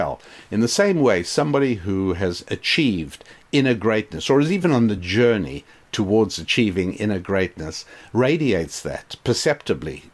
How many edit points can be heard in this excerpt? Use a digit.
0